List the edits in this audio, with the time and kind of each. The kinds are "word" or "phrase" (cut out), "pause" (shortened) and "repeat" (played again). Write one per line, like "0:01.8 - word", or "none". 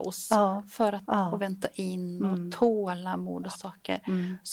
0:01.0 - word
0:03.5 - word

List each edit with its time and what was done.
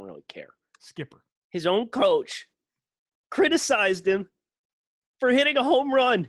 none

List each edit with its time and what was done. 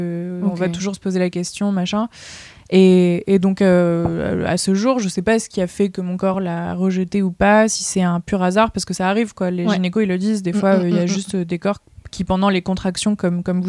none

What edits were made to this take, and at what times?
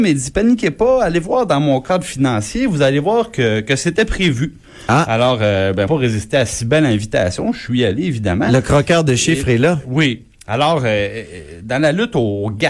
0:05.9 - phrase

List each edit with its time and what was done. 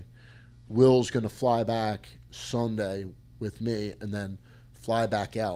none

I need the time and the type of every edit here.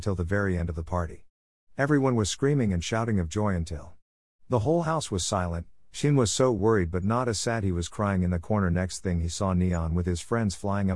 none

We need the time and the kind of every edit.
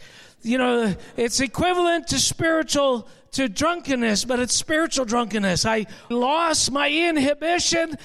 0:06.1 - word

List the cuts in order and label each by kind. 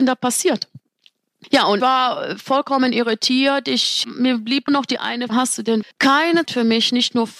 0:01.8 - word
0:04.0 - word
0:04.7 - word
0:05.3 - word
0:05.8 - word
0:06.5 - word

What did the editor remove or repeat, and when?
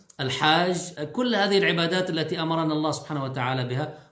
0:01.0 - word

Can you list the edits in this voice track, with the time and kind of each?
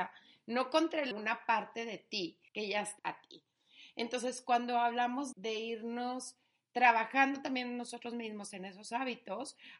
0:01.1 - phrase
0:02.5 - pause
0:03.0 - word
0:05.3 - word

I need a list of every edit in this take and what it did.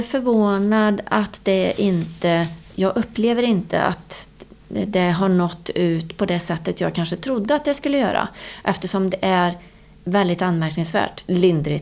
0:02.7 - pause

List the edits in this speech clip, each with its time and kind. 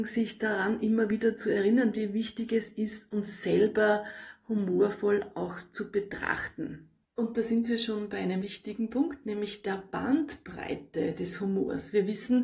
0:07.0 - pause
0:08.4 - word

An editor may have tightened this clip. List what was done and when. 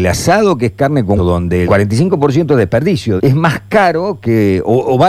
0:01.2 - word
0:01.6 - word
0:03.2 - word

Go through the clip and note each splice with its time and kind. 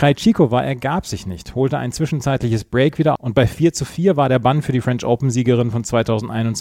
0:03.2 - word

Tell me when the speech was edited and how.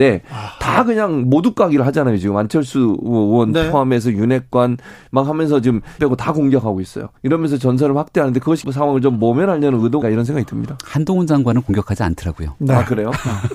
0:06.0 - phrase
0:07.2 - pause
0:08.6 - phrase
0:10.0 - word

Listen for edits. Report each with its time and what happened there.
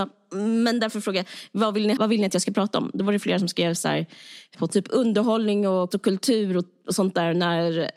0:02.0 - word
0:04.5 - phrase
0:05.9 - word

